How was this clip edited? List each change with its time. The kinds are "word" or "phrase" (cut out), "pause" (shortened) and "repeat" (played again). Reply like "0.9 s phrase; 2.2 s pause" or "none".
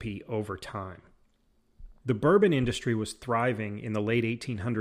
2.0 s pause